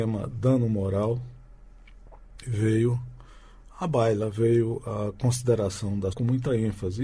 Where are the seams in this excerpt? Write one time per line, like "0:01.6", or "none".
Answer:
0:06.1